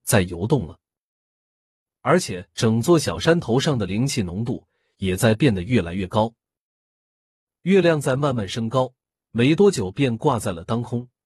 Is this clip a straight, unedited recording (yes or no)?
yes